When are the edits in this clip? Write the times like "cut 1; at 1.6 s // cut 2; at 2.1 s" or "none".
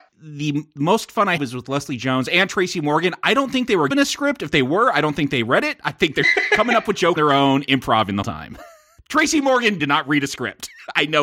cut 1; at 1.4 s // cut 2; at 3.9 s // cut 3; at 6.2 s // cut 4; at 7.2 s // cut 5; at 8.2 s // cut 6; at 9.8 s